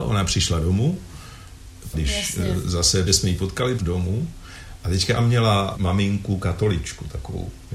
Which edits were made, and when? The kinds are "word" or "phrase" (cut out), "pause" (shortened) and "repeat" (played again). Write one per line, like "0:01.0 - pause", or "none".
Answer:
0:01.9 - phrase
0:03.1 - word
0:03.8 - word
0:05.2 - word
0:05.7 - word